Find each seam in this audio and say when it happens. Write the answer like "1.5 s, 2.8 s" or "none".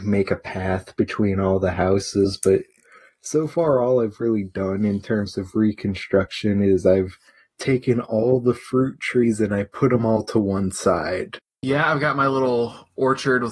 none